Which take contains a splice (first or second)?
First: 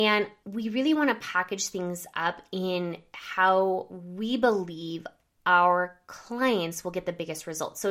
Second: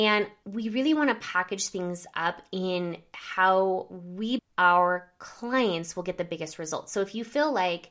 second